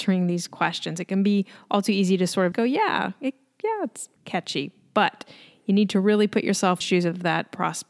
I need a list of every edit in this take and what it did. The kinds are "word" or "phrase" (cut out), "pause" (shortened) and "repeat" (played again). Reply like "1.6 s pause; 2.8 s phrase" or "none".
2.5 s word; 4.2 s pause; 6.8 s phrase